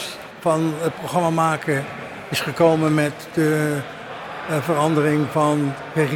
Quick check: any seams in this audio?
no; 0 cuts

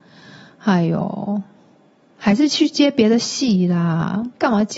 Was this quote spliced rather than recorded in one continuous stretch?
no; 0 cuts

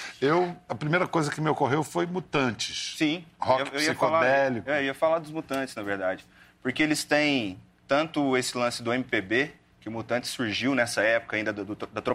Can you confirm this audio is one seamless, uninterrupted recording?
yes; 0 cuts

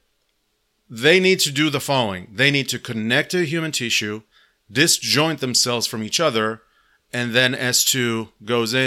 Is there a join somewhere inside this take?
no; 0 cuts

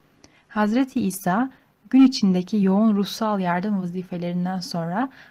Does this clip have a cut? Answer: no; 0 cuts

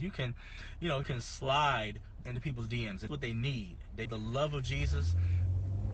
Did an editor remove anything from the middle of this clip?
yes; 4 cuts; at 1.0 s, 2.2 s, 3.1 s, 4.1 s

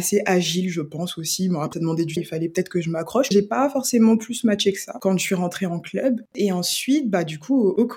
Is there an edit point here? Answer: yes; 4 cuts; at 1.7 s, 2.2 s, 3.3 s, 6.3 s

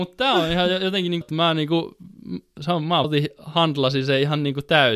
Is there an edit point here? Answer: yes; 2 cuts; at 1.2 s, 3.0 s

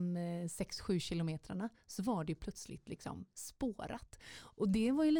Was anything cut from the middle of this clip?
no; 0 cuts

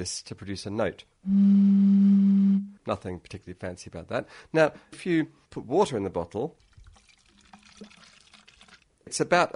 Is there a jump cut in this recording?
yes; 1 cut; at 2.8 s

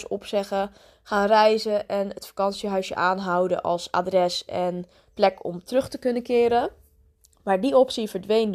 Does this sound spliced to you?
no; 0 cuts

